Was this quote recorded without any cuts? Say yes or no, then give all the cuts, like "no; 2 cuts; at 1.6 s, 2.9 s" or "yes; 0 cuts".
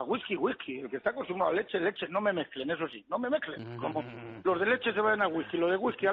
yes; 0 cuts